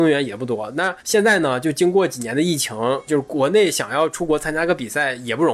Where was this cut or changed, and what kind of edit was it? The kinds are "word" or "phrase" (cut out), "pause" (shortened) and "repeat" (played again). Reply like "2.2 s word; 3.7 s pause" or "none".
1.0 s pause; 3.1 s word